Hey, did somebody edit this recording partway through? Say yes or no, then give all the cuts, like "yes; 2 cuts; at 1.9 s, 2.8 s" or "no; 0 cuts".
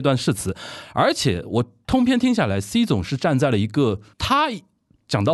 yes; 1 cut; at 4.1 s